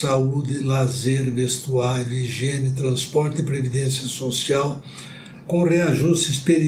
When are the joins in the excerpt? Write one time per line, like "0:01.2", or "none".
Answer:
none